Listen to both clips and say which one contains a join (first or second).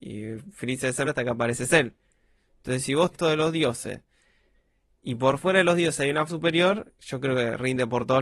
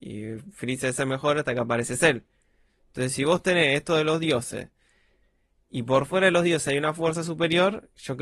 first